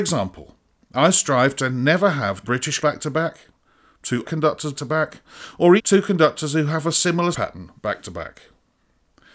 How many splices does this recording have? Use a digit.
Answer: 6